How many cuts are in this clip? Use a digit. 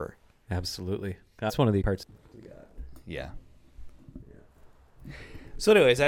3